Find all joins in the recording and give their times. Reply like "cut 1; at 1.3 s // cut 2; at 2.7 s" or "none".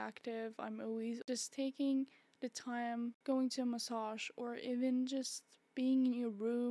none